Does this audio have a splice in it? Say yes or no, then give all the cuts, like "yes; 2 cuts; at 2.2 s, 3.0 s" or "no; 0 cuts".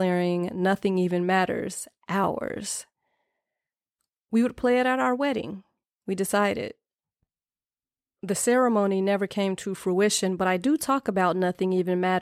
no; 0 cuts